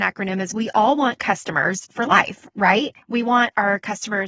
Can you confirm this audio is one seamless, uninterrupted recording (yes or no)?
no